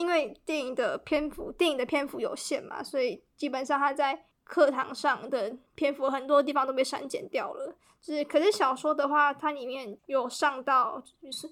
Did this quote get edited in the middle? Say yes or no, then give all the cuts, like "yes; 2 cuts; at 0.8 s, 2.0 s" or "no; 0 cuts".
yes; 3 cuts; at 4.3 s, 5.7 s, 10.0 s